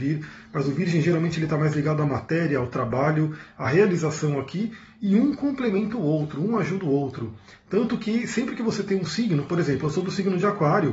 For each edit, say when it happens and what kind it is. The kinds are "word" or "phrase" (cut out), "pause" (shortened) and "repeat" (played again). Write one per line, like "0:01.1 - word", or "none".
none